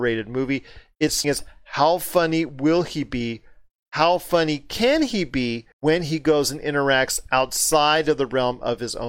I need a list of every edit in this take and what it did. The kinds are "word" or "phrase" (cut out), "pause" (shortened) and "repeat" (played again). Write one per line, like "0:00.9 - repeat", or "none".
0:01.2 - phrase
0:05.7 - pause